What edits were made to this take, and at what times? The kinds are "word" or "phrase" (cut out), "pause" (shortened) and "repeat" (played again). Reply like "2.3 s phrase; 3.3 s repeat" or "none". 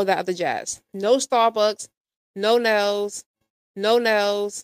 3.6 s repeat